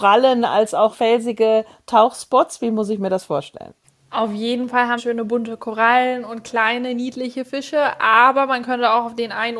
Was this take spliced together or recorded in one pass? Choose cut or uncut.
cut